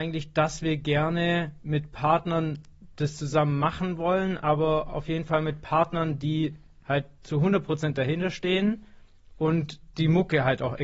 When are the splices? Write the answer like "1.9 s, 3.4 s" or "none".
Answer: none